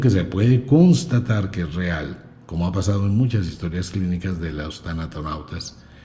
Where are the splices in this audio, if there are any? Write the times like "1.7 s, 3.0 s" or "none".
none